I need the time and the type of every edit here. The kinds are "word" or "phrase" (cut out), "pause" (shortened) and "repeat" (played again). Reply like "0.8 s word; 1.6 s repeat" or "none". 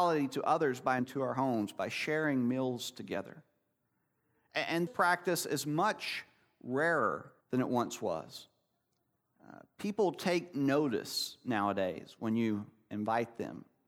1.0 s phrase; 4.9 s word; 7.4 s pause